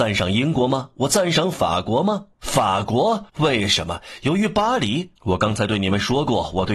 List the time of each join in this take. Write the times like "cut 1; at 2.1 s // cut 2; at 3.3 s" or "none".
cut 1; at 2.3 s // cut 2; at 3.3 s // cut 3; at 5.2 s